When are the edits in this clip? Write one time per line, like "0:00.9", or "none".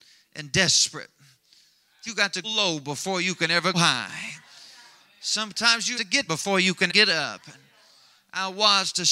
0:02.1
0:02.4
0:03.7
0:05.9
0:06.3
0:06.9